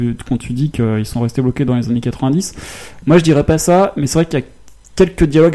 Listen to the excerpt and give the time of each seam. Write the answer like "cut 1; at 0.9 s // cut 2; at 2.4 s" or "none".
none